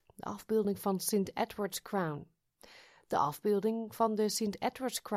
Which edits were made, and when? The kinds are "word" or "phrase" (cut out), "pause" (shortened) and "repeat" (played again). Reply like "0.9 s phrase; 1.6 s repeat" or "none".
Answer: none